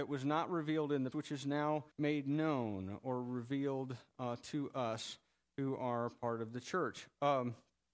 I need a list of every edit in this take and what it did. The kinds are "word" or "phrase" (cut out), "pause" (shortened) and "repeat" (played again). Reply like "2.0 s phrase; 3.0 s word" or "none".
1.1 s word; 1.9 s pause